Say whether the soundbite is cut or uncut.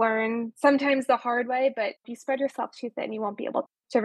cut